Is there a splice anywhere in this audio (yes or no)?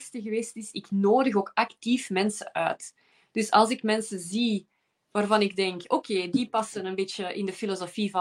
no